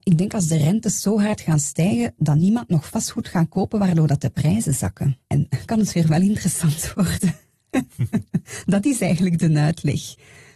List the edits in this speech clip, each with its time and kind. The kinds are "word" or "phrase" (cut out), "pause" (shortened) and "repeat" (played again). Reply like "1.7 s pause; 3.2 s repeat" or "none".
5.7 s word